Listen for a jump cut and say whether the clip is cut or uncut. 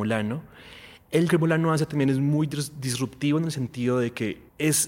cut